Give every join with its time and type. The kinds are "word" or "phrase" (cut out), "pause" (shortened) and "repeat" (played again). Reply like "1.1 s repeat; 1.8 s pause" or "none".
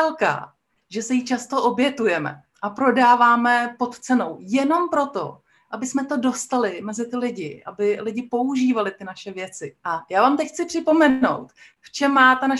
9.8 s pause